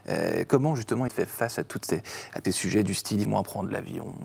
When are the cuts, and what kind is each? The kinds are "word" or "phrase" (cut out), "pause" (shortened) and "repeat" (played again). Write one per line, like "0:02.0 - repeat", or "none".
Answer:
0:01.1 - word
0:02.4 - word
0:03.2 - word

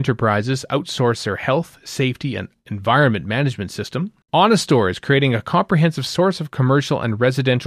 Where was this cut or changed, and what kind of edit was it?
0:04.2 - pause

